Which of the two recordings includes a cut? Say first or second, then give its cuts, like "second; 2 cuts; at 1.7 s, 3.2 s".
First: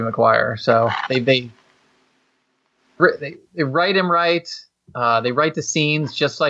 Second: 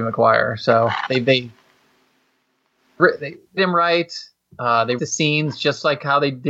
second; 2 cuts; at 3.6 s, 5.0 s